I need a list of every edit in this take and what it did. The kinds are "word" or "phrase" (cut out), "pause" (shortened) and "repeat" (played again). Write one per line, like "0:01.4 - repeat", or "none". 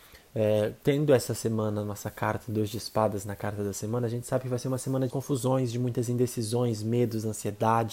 0:05.1 - word

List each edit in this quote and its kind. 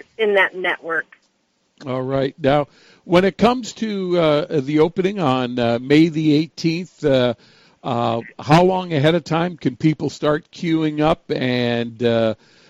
none

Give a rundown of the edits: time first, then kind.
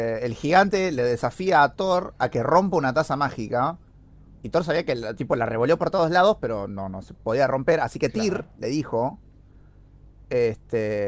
none

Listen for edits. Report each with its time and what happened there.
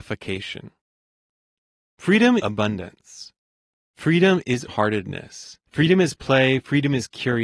0:02.4 - word
0:04.7 - word
0:05.7 - pause

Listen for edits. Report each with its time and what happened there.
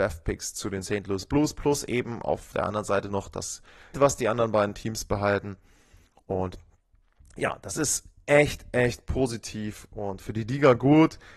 0:03.9 - word

